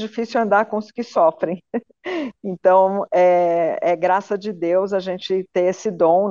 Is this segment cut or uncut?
uncut